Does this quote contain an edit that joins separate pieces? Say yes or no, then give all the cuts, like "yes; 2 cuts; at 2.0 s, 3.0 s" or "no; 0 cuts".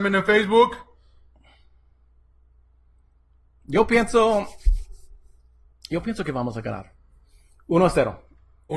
no; 0 cuts